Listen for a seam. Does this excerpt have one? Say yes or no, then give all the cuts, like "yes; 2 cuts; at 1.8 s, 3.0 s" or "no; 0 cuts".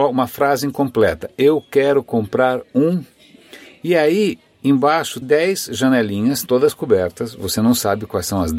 yes; 2 cuts; at 5.2 s, 6.5 s